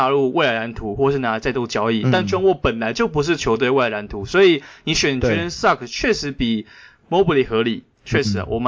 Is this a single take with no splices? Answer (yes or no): yes